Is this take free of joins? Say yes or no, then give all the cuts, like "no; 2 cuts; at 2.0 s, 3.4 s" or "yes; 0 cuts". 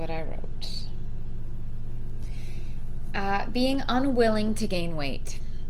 yes; 0 cuts